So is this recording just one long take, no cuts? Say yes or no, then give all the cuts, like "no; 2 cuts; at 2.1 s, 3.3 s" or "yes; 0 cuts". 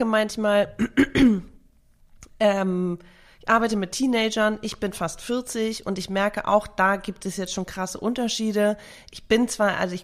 yes; 0 cuts